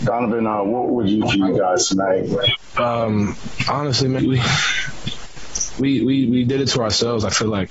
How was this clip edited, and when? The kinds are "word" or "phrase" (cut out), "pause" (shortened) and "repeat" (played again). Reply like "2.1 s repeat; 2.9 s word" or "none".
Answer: 1.2 s phrase; 4.2 s word